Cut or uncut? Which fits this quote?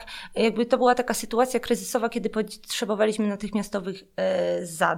uncut